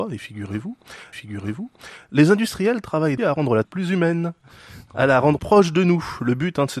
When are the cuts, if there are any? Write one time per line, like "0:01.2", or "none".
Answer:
0:01.1
0:03.2
0:03.6
0:05.4